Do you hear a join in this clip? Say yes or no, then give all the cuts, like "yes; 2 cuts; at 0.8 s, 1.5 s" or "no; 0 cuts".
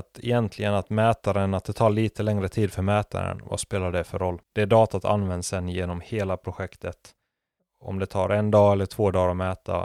yes; 2 cuts; at 4.4 s, 7.6 s